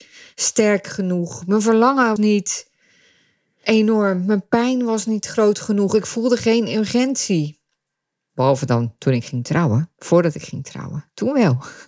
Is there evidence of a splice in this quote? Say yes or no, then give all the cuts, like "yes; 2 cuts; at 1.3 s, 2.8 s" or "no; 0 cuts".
yes; 1 cut; at 2.2 s